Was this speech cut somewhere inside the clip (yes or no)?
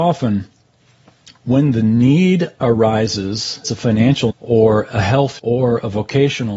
yes